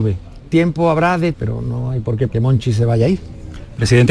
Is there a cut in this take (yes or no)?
yes